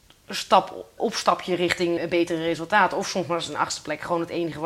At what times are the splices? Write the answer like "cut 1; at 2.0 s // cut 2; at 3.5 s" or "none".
cut 1; at 1.0 s // cut 2; at 2.0 s